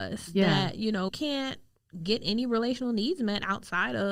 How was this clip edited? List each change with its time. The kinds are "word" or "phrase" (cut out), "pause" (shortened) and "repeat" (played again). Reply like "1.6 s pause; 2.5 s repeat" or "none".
1.1 s word

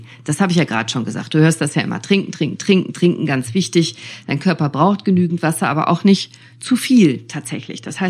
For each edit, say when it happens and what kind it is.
none

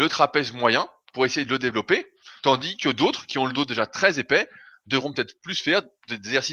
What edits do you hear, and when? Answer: 2.4 s pause

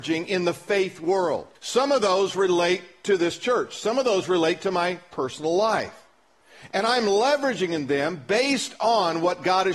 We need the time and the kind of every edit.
1.5 s pause

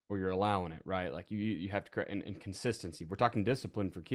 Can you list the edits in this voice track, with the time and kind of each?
none

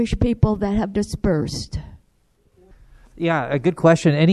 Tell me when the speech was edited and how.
0.9 s word

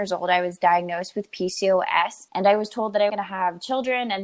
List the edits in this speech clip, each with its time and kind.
2.3 s pause; 3.1 s word

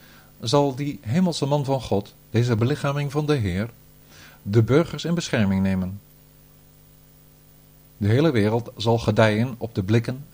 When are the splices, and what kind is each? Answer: none

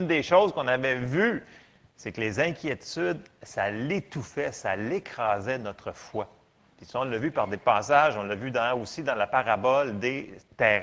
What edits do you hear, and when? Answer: none

